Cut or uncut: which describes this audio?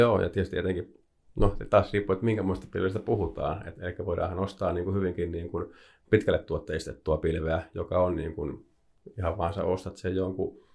uncut